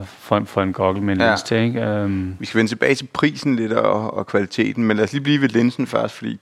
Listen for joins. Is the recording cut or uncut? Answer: uncut